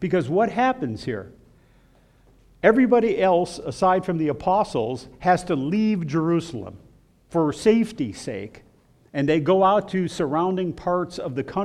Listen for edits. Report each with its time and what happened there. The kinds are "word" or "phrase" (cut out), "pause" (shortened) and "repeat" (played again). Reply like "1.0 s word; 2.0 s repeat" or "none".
none

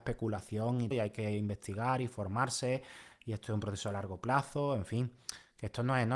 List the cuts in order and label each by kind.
0.9 s word

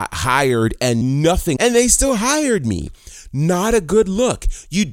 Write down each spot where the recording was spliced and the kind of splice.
1.0 s phrase; 1.6 s phrase

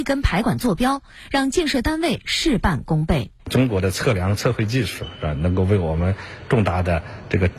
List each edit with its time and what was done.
3.4 s pause

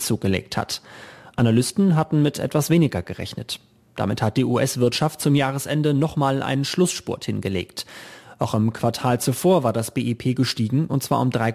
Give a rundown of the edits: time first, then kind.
none

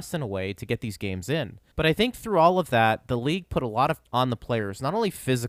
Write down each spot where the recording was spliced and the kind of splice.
1.7 s pause; 4.0 s word

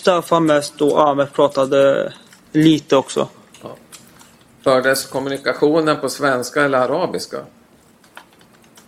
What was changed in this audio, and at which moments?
none

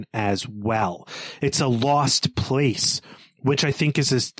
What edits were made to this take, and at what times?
none

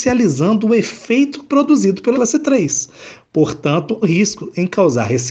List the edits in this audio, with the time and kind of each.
2.1 s word; 4.0 s phrase

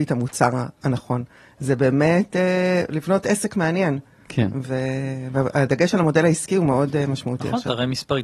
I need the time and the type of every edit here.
none

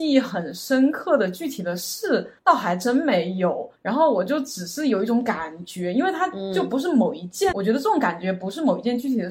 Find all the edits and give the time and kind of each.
2.4 s pause; 3.7 s pause; 7.5 s word

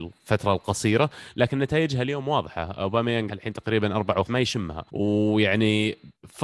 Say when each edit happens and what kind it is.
3.3 s word; 4.2 s phrase; 4.9 s pause

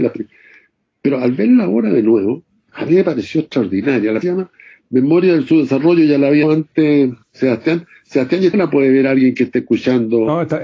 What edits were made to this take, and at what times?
2.7 s word; 4.2 s phrase; 6.4 s word; 7.2 s pause; 8.5 s phrase

